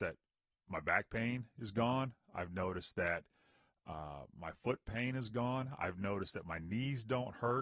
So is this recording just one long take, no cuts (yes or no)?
yes